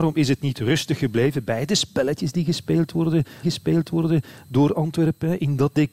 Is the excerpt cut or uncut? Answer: cut